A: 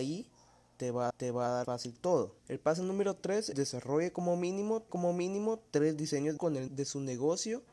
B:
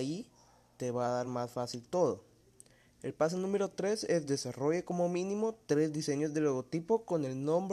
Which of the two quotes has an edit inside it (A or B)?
A